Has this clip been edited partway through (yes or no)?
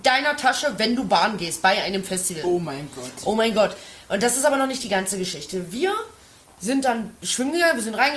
no